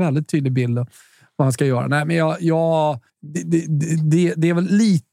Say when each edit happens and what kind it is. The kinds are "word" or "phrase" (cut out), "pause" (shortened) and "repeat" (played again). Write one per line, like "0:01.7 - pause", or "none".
0:03.1 - pause